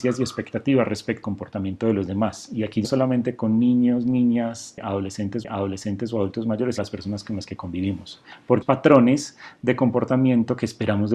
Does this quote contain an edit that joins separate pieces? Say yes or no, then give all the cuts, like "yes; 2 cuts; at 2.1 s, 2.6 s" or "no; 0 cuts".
yes; 5 cuts; at 1.2 s, 2.8 s, 5.4 s, 6.8 s, 8.6 s